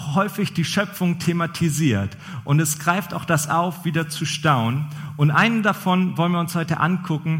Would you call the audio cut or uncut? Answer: uncut